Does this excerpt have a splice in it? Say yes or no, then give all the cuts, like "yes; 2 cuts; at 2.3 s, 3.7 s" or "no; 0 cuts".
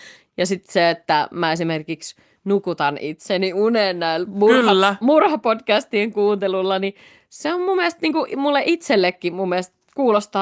no; 0 cuts